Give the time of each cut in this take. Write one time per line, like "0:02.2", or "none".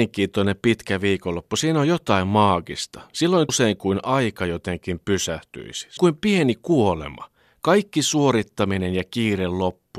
0:03.5
0:06.0